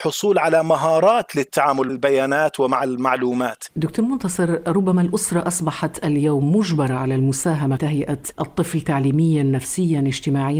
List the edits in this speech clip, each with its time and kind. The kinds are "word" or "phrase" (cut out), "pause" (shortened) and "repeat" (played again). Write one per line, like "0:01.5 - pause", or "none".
0:01.9 - word
0:07.8 - word

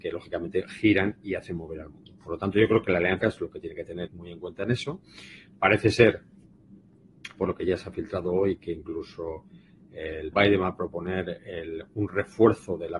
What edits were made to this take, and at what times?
0:03.2 - word
0:04.1 - word
0:10.3 - word

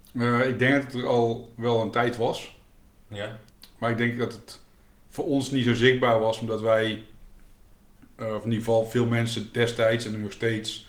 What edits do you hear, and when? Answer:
none

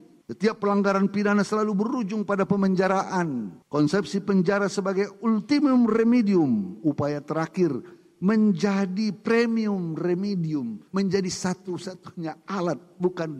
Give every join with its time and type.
0:10.9 - pause

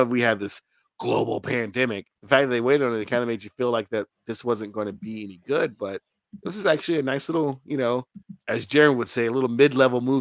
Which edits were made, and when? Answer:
0:02.2 - pause

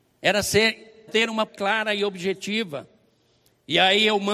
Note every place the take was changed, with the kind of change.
0:01.1 - phrase
0:01.5 - word

